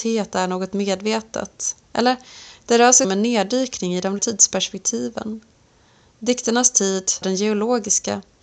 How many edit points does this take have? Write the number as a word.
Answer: three